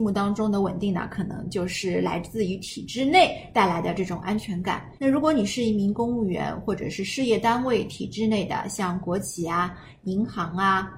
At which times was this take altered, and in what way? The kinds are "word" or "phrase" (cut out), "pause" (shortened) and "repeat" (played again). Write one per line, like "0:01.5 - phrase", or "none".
0:05.0 - pause